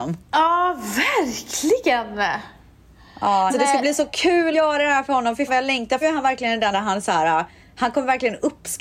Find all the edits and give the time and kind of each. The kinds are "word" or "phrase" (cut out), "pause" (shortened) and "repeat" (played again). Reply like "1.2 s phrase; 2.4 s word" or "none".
3.5 s word; 4.5 s word; 5.5 s word; 6.0 s word; 6.7 s word